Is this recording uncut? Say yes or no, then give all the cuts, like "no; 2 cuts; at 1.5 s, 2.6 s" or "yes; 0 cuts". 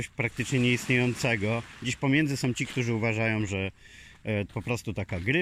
no; 1 cut; at 4.5 s